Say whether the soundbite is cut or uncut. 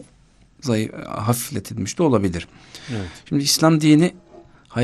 uncut